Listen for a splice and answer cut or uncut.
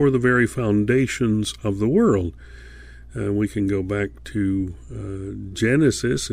uncut